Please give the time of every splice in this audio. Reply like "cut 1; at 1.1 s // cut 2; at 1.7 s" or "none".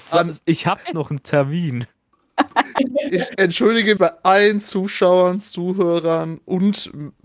cut 1; at 4.0 s